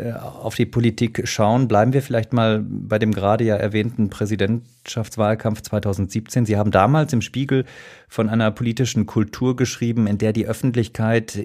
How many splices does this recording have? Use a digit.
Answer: 0